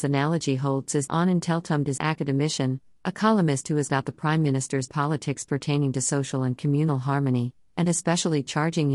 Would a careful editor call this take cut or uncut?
cut